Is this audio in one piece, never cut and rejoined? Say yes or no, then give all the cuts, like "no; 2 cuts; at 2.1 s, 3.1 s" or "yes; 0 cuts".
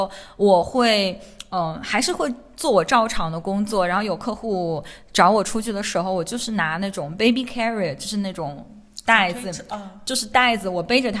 yes; 0 cuts